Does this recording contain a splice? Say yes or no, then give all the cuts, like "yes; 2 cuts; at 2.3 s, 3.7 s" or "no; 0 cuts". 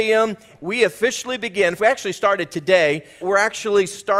yes; 2 cuts; at 1.8 s, 3.2 s